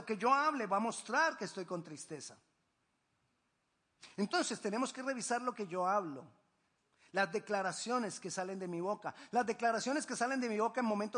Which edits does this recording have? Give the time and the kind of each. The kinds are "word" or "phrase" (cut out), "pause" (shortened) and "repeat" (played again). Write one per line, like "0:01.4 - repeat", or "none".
none